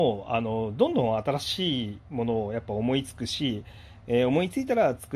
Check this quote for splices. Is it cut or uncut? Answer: cut